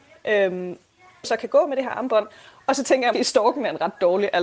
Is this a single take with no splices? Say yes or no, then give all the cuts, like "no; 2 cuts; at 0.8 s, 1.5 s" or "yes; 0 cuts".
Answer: no; 2 cuts; at 1.2 s, 3.1 s